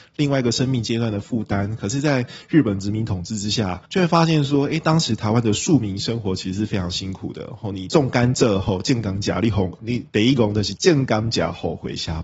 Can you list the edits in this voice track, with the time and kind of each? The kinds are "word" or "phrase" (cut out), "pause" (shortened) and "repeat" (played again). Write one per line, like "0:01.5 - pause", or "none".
0:03.8 - pause